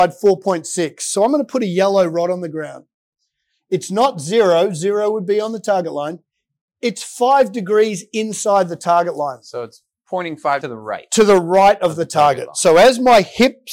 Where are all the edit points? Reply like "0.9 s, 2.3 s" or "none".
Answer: 10.6 s